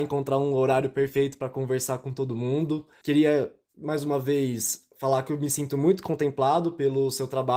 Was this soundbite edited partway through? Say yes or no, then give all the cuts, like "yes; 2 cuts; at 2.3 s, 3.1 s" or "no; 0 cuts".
no; 0 cuts